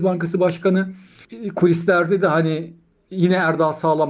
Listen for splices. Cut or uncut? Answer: uncut